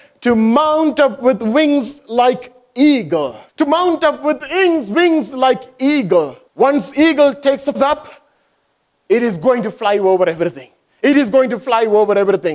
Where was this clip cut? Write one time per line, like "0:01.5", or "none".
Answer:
0:03.5
0:06.5
0:07.7

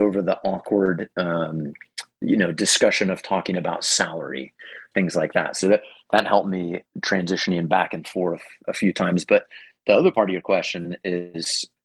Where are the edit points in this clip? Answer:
none

